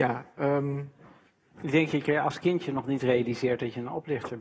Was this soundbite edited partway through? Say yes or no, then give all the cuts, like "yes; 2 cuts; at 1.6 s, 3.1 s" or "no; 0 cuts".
no; 0 cuts